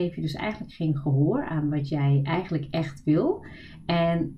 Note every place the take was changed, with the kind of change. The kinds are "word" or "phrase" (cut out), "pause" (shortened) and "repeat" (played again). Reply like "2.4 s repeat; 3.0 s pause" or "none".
none